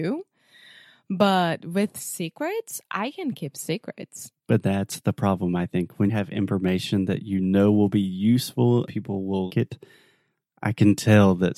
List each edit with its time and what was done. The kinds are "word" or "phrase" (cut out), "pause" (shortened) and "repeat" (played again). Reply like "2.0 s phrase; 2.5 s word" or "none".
6.1 s word; 8.9 s word; 9.5 s word